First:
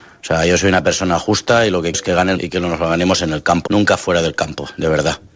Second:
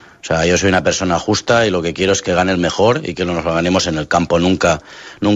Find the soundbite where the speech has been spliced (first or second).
first